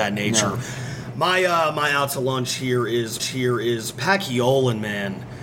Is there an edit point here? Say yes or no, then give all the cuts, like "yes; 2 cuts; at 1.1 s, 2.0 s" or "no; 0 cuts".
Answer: yes; 1 cut; at 3.2 s